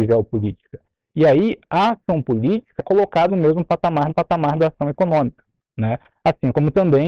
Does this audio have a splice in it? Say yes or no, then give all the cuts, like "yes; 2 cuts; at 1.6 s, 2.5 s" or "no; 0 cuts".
yes; 3 cuts; at 2.8 s, 3.3 s, 4.1 s